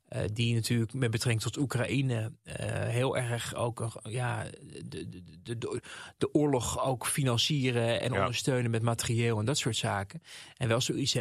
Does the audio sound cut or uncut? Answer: uncut